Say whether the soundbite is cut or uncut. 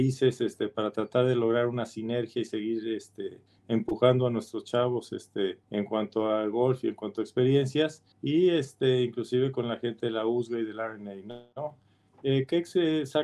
cut